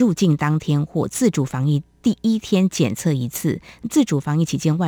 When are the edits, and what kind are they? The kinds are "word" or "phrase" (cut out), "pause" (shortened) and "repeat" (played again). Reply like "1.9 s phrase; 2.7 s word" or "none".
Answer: none